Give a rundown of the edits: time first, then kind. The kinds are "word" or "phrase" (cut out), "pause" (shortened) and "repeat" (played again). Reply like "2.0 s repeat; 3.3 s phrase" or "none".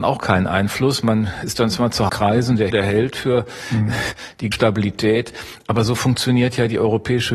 2.1 s phrase; 2.7 s word; 4.5 s word